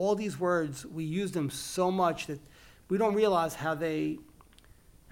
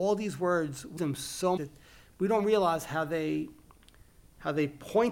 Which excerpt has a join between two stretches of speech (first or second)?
second